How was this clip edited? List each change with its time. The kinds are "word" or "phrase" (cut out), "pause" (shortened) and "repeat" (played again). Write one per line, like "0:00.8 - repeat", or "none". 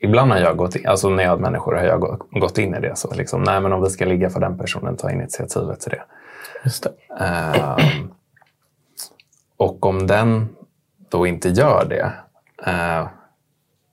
0:01.4 - word
0:03.1 - word